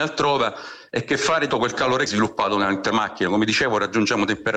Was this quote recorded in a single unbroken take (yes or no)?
no